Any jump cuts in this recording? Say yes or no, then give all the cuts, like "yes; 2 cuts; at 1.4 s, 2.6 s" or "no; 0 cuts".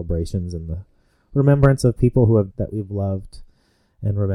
yes; 1 cut; at 2.5 s